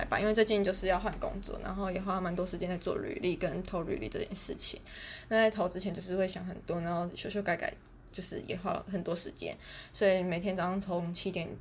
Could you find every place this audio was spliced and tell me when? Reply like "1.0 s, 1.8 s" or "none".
8.1 s